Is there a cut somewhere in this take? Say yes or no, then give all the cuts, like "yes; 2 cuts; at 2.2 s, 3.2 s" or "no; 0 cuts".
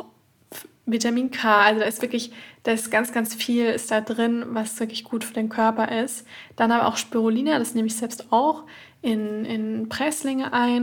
no; 0 cuts